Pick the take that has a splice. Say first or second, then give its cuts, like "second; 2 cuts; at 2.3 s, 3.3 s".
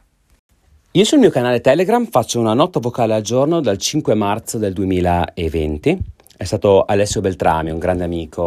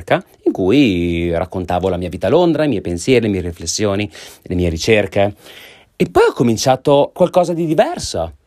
second; 1 cut; at 7.2 s